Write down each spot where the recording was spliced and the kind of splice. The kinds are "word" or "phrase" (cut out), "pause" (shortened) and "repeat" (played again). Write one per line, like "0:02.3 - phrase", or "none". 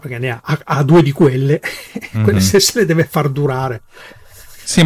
none